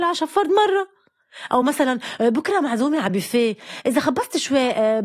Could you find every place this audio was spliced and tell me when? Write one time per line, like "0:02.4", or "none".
none